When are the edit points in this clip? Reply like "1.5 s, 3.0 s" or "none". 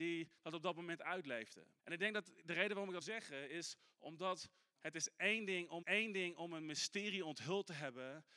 1.8 s, 3.0 s, 4.8 s, 5.8 s